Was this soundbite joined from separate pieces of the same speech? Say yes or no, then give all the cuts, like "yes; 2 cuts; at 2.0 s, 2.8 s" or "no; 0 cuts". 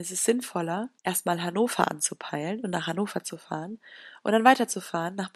yes; 1 cut; at 1.0 s